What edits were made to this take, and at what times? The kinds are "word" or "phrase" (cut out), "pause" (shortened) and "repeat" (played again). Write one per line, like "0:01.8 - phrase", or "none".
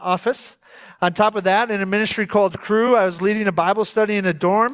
none